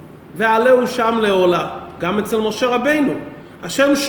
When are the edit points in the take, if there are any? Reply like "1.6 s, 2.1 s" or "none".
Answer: none